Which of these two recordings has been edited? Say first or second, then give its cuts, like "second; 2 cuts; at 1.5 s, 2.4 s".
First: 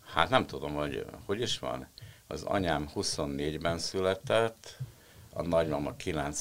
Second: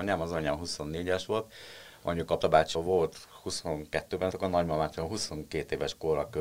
second; 3 cuts; at 2.4 s, 2.7 s, 4.3 s